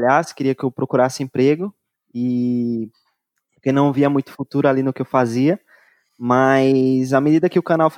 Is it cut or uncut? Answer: uncut